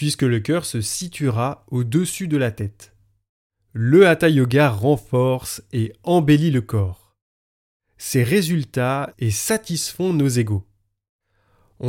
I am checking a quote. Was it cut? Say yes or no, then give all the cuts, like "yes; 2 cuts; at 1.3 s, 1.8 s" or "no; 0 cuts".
yes; 2 cuts; at 3.3 s, 9.1 s